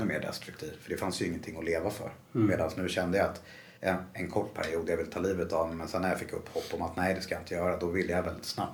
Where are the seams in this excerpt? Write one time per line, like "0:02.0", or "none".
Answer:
0:03.8